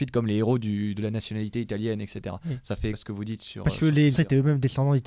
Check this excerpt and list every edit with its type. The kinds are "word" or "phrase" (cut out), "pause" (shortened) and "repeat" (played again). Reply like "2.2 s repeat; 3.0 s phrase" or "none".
2.9 s word; 4.1 s word